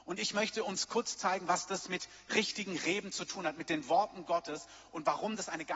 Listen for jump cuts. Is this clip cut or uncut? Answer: cut